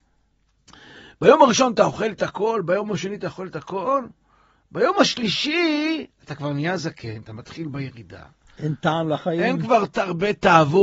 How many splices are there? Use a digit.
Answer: 0